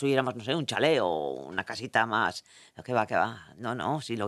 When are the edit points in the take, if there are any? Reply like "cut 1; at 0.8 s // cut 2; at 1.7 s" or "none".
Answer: none